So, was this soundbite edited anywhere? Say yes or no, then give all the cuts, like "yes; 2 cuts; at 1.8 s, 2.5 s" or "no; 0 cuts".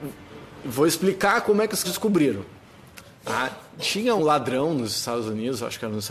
yes; 2 cuts; at 1.8 s, 4.2 s